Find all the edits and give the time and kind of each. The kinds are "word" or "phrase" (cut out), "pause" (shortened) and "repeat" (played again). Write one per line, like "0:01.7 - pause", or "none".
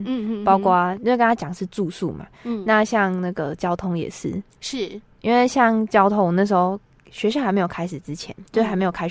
none